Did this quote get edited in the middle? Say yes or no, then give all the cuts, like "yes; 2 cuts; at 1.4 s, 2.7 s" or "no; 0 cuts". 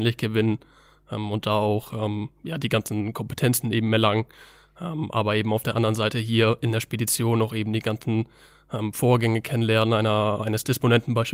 no; 0 cuts